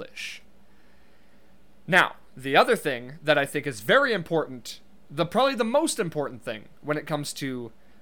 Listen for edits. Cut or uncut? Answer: uncut